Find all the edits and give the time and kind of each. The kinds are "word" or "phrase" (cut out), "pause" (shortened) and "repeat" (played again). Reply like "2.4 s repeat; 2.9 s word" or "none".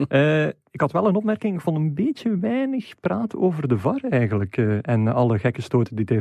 none